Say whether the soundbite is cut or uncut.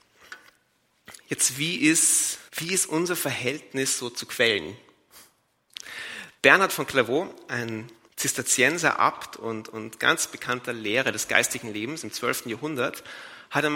cut